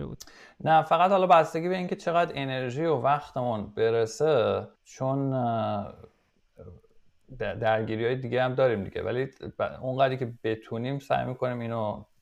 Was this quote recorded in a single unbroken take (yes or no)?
no